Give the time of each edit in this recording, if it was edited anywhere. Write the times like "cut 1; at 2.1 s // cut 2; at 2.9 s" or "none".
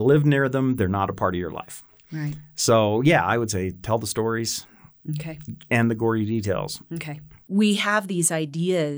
none